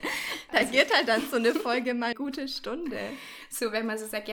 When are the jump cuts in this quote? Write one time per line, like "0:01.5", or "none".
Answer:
0:02.1